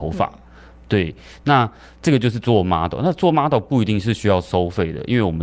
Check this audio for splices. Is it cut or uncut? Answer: uncut